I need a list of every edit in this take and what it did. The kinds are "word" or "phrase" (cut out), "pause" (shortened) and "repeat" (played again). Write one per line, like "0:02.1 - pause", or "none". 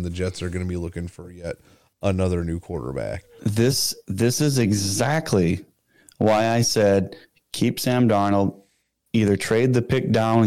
none